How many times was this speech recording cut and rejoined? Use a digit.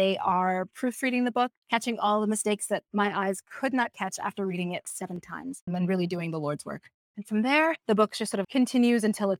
2